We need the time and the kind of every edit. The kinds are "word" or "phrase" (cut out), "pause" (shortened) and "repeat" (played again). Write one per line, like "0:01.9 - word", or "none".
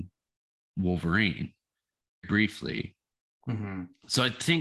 0:02.2 - word